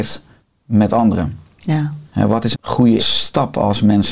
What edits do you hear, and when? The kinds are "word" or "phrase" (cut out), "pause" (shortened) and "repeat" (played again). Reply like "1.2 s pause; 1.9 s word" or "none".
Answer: 2.1 s pause; 2.5 s word; 3.0 s word